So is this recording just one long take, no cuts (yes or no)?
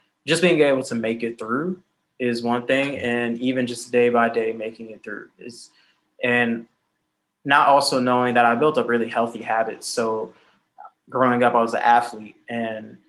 yes